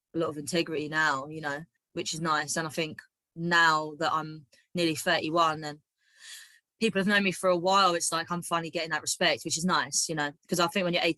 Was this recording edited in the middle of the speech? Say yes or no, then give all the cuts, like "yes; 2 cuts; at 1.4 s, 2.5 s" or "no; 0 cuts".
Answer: no; 0 cuts